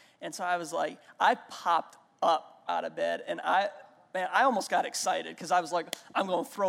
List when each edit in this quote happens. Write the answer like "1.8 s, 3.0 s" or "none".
none